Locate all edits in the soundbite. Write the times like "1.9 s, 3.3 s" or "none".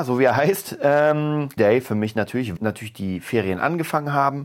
1.6 s, 2.6 s